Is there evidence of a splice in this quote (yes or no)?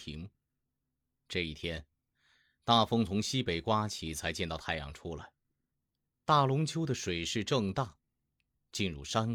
no